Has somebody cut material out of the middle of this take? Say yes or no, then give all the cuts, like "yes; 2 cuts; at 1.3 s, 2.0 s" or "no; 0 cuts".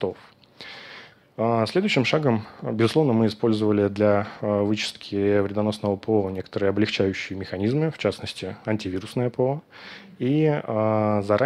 no; 0 cuts